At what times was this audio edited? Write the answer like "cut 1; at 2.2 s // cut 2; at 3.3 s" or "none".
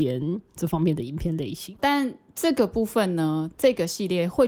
cut 1; at 1.7 s